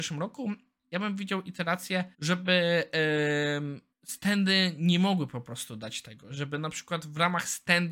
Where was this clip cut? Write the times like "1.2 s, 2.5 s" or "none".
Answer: 2.1 s, 3.9 s